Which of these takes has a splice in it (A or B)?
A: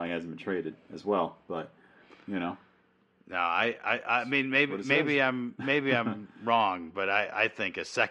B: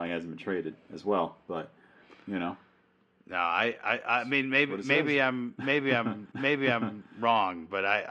B